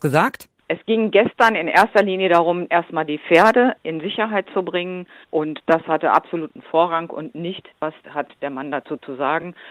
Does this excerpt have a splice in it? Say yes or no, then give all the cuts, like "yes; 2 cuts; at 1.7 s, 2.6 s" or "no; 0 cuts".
yes; 1 cut; at 7.7 s